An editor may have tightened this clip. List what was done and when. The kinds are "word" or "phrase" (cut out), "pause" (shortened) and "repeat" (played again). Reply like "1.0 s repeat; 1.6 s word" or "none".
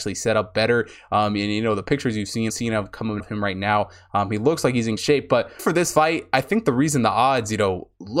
2.5 s word; 3.2 s word; 5.0 s word; 5.6 s word